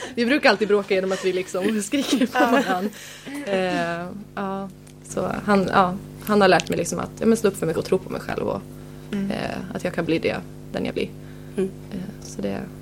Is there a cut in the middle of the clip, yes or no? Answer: yes